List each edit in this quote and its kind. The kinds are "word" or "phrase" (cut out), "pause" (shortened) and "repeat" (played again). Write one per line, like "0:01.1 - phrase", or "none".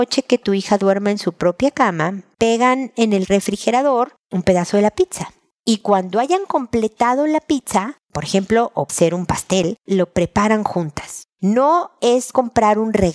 0:08.9 - word